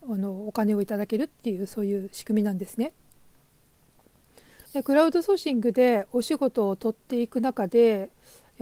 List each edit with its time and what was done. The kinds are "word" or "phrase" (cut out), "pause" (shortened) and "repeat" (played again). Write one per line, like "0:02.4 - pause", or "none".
0:04.7 - pause